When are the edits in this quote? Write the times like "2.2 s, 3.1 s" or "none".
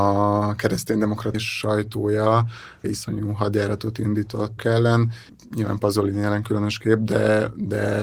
1.3 s, 2.8 s, 4.6 s, 5.3 s